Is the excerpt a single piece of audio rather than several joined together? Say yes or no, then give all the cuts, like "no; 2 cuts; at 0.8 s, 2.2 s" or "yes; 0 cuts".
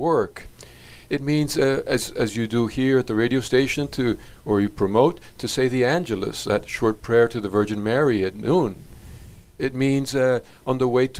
yes; 0 cuts